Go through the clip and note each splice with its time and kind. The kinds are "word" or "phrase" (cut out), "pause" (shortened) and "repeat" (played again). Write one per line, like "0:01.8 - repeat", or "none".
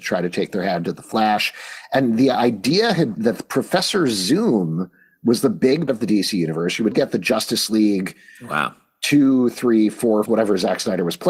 0:03.1 - word
0:05.9 - word
0:06.9 - word
0:10.3 - word

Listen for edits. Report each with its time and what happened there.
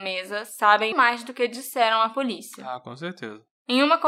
0:00.9 - word

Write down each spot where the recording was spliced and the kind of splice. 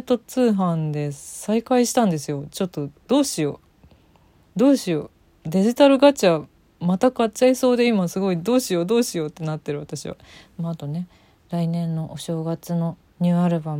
none

